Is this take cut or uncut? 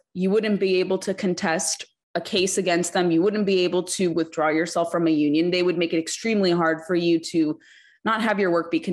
uncut